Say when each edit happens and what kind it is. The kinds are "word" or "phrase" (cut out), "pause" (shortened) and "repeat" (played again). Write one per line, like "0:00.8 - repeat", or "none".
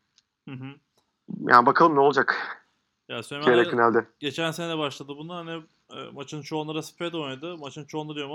none